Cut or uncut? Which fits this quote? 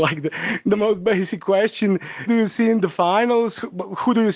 cut